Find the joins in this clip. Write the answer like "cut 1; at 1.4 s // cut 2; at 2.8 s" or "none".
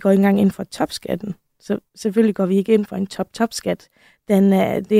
none